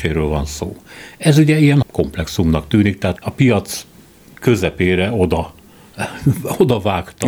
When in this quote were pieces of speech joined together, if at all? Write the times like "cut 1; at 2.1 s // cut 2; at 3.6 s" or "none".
cut 1; at 1.8 s // cut 2; at 3.2 s